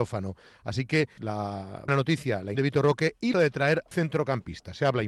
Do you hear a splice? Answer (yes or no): yes